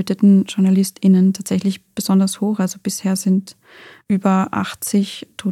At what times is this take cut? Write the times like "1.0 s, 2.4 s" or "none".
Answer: none